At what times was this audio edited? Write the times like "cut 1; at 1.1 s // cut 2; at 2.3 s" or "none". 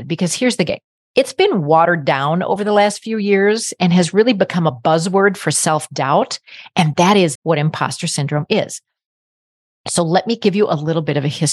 cut 1; at 1.0 s // cut 2; at 7.3 s